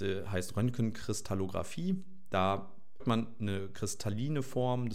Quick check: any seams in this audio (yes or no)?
yes